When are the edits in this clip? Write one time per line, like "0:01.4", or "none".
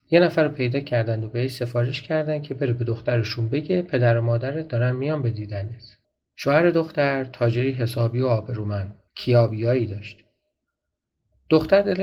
0:06.0
0:09.1